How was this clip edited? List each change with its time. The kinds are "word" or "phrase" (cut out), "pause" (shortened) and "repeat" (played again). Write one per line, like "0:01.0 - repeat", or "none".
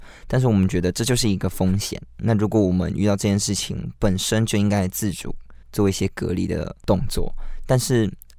0:05.6 - pause